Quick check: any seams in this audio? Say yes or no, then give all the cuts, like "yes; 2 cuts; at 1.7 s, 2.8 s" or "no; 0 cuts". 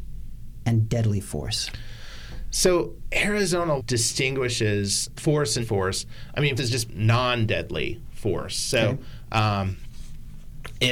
yes; 5 cuts; at 3.8 s, 5.2 s, 5.6 s, 6.6 s, 6.9 s